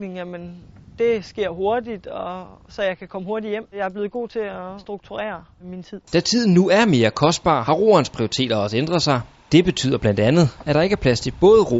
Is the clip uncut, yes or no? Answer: no